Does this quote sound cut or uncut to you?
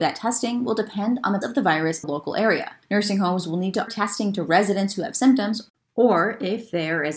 cut